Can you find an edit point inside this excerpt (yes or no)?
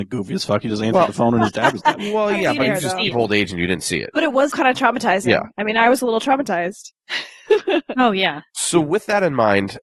yes